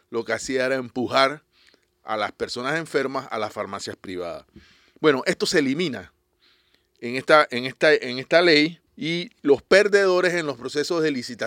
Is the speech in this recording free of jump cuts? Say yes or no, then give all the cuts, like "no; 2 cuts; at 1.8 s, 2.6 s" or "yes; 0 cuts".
no; 1 cut; at 8.9 s